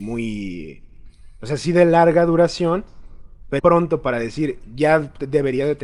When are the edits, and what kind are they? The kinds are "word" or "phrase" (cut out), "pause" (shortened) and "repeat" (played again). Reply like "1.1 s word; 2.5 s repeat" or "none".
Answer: 3.6 s word

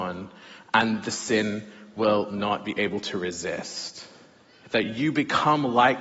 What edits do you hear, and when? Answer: none

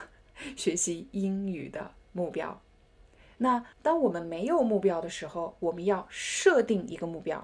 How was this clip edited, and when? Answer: 3.7 s pause

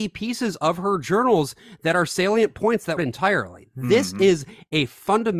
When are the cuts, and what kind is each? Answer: 3.0 s phrase

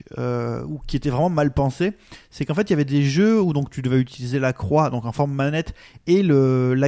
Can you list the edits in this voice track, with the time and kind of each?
none

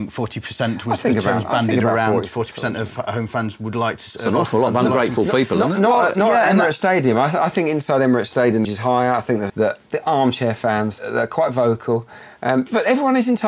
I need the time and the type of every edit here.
8.6 s phrase; 9.5 s phrase

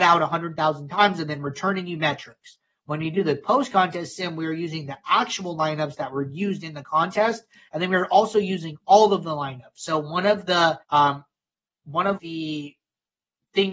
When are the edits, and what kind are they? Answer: 10.8 s pause; 12.2 s word

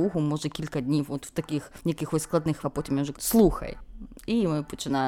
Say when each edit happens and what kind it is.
1.8 s pause; 2.6 s word; 3.1 s word

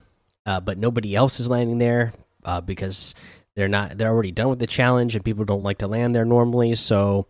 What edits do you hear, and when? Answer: none

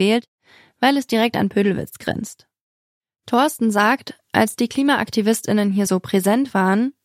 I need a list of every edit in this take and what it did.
none

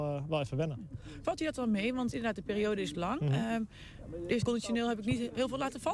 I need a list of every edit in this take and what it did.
2.9 s word; 4.4 s word

